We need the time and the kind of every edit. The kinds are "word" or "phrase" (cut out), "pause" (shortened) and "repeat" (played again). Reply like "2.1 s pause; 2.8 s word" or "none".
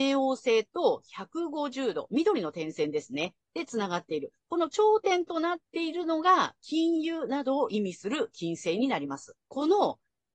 9.4 s pause

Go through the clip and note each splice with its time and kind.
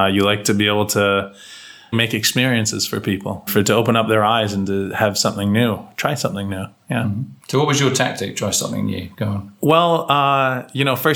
1.9 s word; 3.5 s word

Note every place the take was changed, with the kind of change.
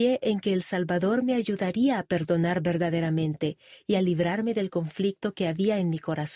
none

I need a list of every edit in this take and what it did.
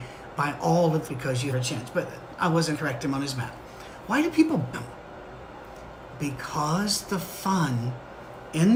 1.1 s phrase; 1.5 s phrase; 2.7 s word; 4.7 s word

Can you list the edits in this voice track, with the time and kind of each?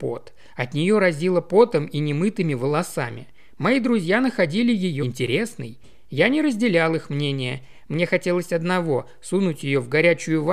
5.0 s word

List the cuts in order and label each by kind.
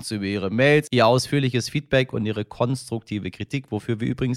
none

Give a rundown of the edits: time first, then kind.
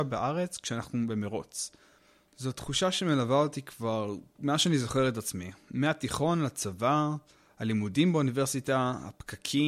none

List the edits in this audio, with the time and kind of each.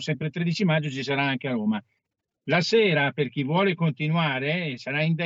none

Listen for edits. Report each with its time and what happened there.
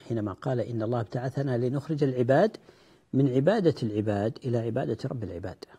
none

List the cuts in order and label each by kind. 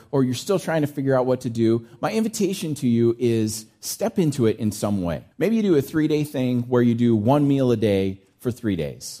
5.3 s pause

